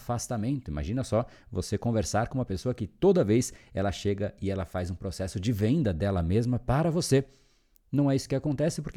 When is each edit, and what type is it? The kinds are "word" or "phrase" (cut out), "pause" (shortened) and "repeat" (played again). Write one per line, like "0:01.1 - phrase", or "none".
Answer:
none